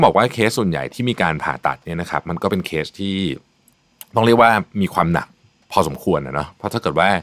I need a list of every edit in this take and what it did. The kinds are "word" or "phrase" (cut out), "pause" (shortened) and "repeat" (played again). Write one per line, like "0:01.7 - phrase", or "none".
none